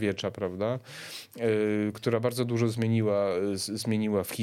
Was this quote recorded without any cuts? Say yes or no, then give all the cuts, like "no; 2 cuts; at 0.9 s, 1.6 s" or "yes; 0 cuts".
yes; 0 cuts